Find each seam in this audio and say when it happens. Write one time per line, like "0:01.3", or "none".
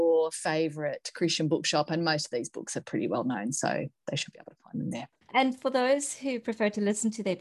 none